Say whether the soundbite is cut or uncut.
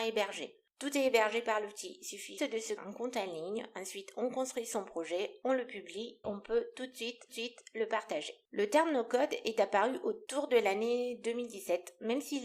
cut